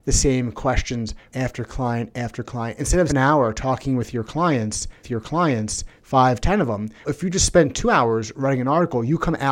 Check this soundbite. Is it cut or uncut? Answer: cut